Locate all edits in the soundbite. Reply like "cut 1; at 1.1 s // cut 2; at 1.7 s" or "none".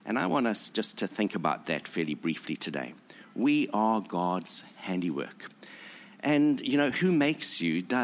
none